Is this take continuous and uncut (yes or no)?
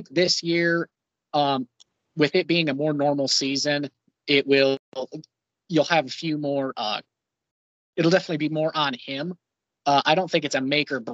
yes